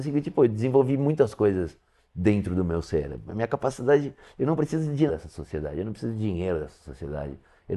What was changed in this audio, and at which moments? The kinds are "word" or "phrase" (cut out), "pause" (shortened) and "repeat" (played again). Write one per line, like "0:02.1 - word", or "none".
0:05.1 - word